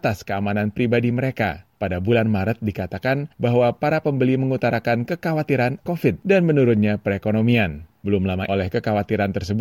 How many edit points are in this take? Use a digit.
2